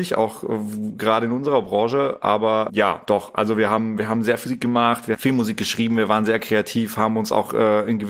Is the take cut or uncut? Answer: cut